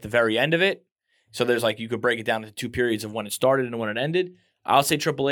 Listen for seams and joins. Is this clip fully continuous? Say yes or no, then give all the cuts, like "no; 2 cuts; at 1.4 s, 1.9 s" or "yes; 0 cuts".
yes; 0 cuts